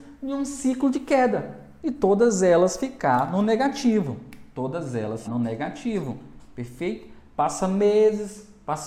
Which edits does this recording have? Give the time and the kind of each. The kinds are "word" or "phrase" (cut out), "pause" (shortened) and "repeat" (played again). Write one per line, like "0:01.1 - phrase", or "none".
0:05.2 - word